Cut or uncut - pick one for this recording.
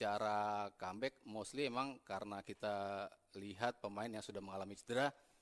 uncut